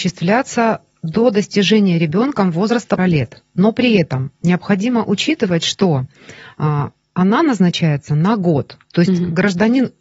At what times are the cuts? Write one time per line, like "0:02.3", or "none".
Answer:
0:03.0
0:07.0
0:08.8